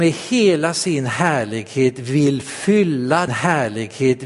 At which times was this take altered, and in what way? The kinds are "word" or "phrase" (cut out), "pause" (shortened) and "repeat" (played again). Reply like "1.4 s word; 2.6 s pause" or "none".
3.3 s repeat